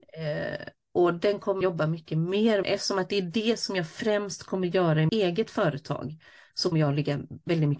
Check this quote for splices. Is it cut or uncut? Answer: cut